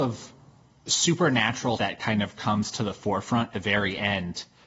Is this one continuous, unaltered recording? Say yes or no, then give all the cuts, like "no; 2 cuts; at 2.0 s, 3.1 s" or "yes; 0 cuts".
no; 2 cuts; at 1.8 s, 3.5 s